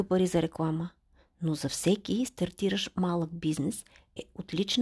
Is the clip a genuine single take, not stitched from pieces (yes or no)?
yes